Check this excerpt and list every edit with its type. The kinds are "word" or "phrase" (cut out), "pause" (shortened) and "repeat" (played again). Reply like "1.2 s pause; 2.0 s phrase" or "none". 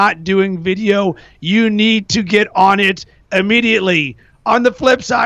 none